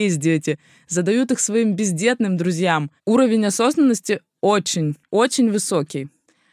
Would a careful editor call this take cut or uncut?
cut